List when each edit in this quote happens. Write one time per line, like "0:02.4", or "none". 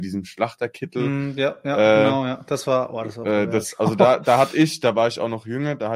none